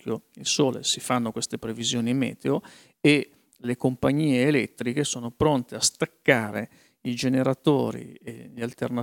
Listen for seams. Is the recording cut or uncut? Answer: uncut